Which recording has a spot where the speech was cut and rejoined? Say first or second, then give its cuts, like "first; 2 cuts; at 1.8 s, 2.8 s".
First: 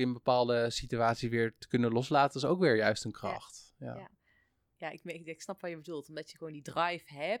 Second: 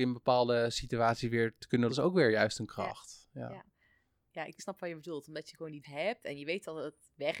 second; 3 cuts; at 1.9 s, 4.6 s, 5.8 s